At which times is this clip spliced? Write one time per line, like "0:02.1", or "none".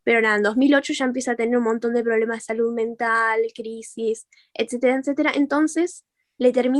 none